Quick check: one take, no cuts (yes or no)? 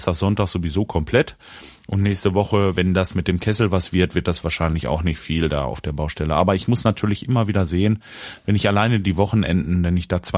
yes